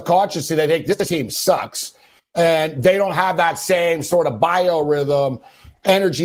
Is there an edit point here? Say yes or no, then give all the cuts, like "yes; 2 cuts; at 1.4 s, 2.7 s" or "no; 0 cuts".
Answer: no; 0 cuts